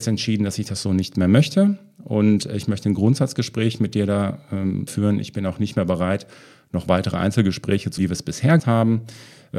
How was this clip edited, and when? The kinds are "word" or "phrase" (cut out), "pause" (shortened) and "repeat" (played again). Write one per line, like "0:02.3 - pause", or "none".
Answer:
0:04.9 - word
0:08.0 - word
0:08.6 - word